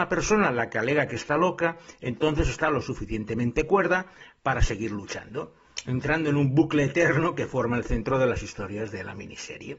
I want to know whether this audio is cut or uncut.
uncut